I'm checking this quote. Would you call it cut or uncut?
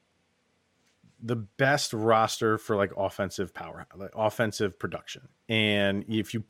cut